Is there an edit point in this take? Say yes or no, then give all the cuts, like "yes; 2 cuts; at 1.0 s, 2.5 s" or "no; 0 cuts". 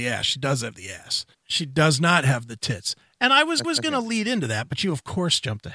yes; 2 cuts; at 1.3 s, 3.6 s